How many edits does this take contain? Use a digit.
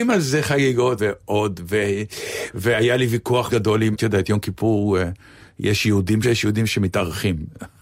4